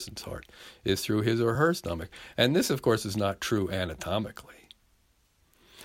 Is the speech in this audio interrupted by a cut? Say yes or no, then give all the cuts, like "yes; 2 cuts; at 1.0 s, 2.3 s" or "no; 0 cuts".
no; 0 cuts